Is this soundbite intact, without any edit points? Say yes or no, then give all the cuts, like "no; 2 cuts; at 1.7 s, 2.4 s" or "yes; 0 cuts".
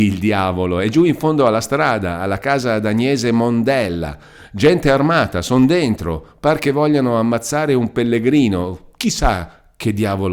yes; 0 cuts